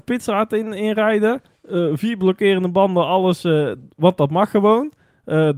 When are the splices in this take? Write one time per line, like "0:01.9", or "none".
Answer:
none